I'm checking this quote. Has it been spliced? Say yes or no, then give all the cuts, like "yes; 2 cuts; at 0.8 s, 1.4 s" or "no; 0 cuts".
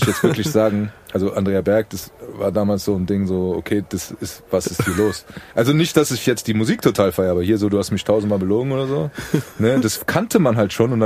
yes; 1 cut; at 5.5 s